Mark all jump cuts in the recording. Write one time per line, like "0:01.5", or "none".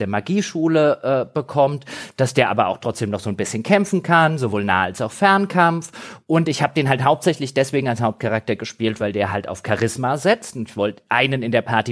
none